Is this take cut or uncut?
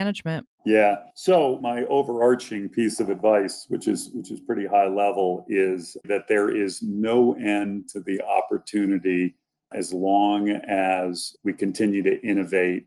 cut